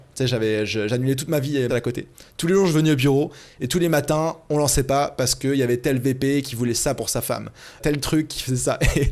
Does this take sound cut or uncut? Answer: cut